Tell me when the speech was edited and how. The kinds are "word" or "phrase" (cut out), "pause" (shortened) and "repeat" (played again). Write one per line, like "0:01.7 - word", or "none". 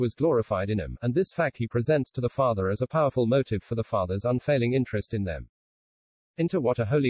none